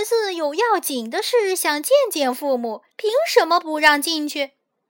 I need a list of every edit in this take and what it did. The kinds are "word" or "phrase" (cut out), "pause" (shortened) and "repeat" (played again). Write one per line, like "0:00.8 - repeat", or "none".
0:02.9 - pause